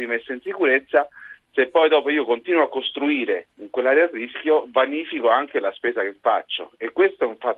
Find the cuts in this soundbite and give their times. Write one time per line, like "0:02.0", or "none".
none

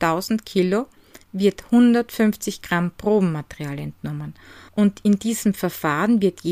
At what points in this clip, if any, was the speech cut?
0:01.2
0:04.7

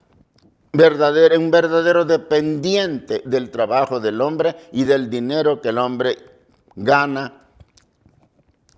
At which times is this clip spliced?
none

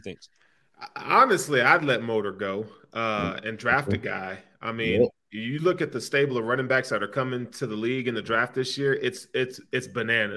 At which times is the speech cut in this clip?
none

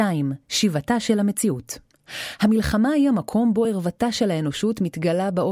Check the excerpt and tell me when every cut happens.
none

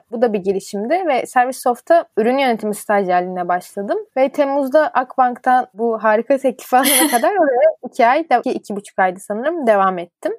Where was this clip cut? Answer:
0:08.4

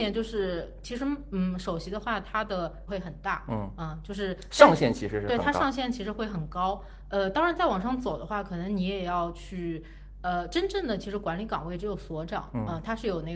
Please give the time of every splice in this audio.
0:02.9

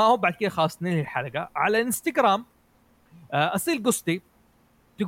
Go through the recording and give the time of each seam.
none

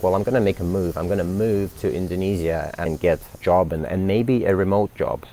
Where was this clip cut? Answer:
0:02.9
0:03.4

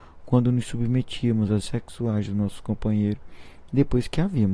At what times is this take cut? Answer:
0:01.6

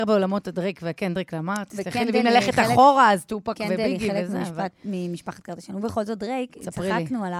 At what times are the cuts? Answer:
none

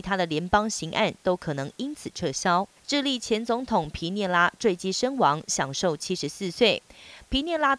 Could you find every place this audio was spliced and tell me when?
0:02.8

